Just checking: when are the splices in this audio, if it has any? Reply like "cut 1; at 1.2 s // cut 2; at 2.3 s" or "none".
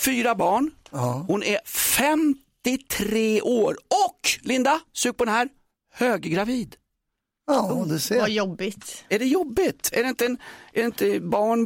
none